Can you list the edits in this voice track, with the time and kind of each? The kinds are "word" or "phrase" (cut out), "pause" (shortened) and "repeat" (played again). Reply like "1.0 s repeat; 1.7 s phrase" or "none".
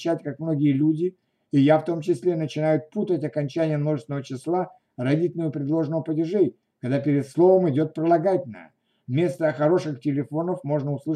none